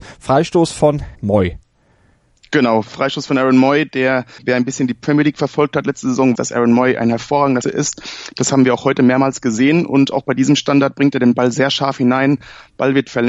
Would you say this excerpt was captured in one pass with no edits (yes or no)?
no